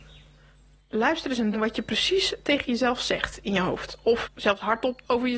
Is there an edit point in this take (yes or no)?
yes